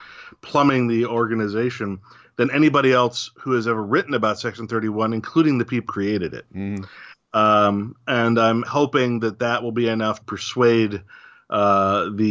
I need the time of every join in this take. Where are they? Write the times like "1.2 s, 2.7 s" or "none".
5.9 s, 8.7 s, 10.2 s